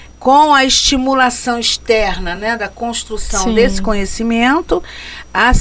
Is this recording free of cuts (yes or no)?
yes